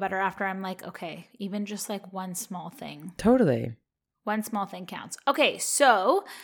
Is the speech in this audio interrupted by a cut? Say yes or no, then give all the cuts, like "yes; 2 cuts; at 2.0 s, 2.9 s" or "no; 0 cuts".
no; 0 cuts